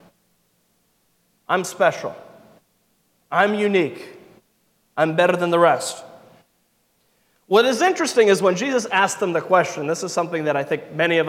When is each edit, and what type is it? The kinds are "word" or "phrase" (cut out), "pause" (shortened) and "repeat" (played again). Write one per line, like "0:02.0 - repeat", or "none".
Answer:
none